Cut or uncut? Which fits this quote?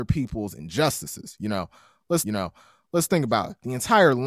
cut